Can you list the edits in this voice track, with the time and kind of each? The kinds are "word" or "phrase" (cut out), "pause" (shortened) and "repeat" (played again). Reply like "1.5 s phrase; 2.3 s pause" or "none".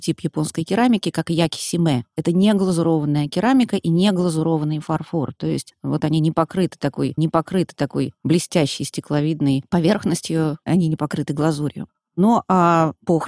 7.2 s repeat